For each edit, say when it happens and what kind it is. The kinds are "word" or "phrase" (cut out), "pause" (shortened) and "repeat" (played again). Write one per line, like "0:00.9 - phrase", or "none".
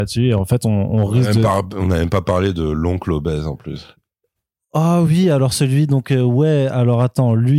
none